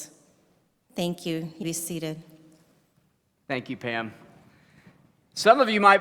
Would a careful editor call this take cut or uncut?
cut